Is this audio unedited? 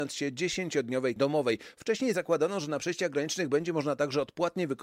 no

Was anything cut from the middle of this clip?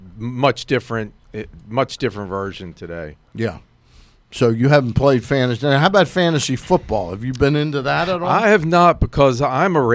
no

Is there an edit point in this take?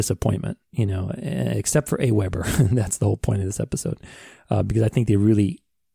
no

